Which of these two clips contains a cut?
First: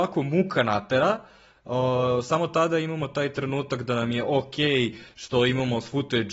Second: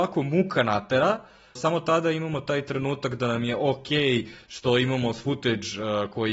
second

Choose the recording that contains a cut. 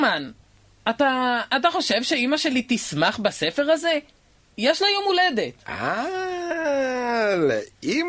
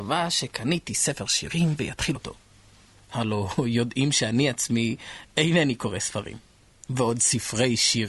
second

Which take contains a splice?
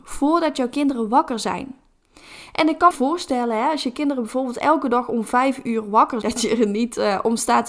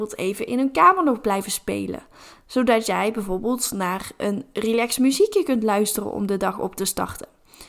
first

